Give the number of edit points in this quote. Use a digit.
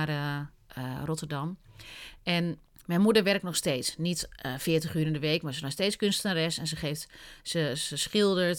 1